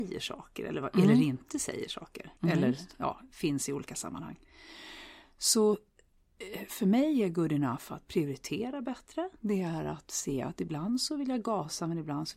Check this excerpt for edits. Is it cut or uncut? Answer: cut